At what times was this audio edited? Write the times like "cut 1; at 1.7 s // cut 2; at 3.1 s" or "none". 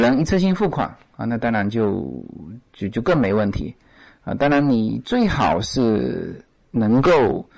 none